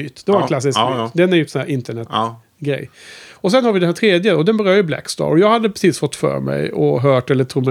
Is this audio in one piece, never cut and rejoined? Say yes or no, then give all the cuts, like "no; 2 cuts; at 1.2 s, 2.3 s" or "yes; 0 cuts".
yes; 0 cuts